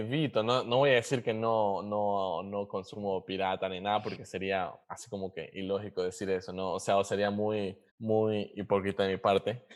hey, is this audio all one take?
no; 2 cuts; at 4.8 s, 7.9 s

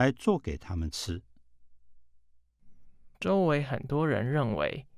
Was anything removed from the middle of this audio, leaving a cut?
yes; 1 cut; at 3.1 s

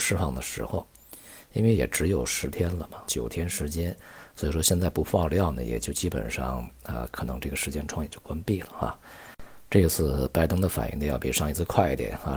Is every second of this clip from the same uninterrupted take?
no; 1 cut; at 3.1 s

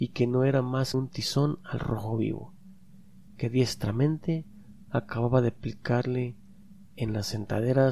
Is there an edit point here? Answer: yes; 1 cut; at 0.9 s

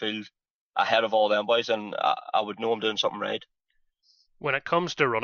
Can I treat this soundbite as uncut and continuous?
yes; 0 cuts

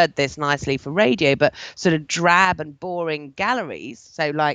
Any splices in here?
no; 0 cuts

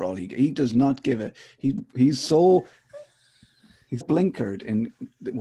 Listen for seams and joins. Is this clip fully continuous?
no; 1 cut; at 4.0 s

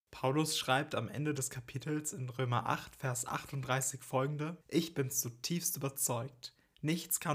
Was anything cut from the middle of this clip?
yes; 1 cut; at 4.6 s

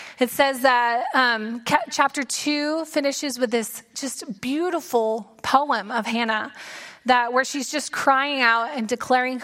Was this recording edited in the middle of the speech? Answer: no; 0 cuts

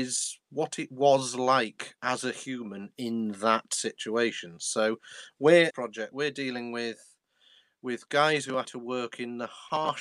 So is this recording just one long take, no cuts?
no; 2 cuts; at 5.7 s, 8.6 s

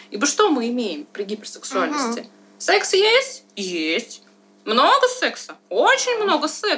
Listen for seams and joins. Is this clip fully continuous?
yes; 0 cuts

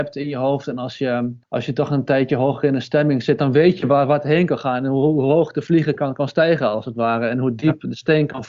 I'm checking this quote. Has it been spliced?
yes; 1 cut; at 1.4 s

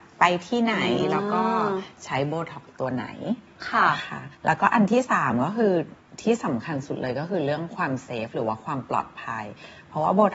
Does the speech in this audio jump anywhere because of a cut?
yes; 1 cut; at 4.3 s

